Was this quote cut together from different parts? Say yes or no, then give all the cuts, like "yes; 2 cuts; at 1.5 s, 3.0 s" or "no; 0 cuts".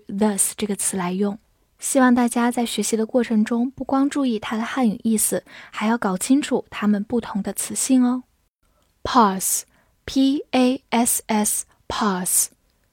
no; 0 cuts